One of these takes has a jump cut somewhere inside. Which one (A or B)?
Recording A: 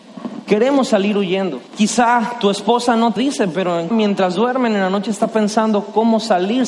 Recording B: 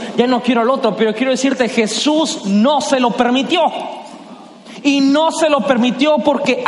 A